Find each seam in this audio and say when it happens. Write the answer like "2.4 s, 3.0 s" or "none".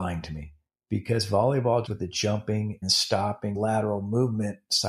1.9 s, 2.8 s, 3.5 s